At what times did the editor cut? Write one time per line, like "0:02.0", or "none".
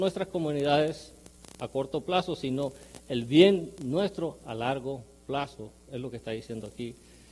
none